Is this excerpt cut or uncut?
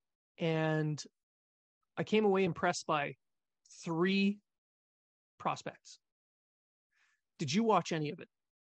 uncut